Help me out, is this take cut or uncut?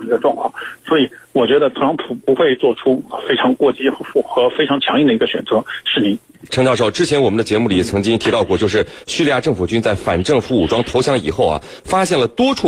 cut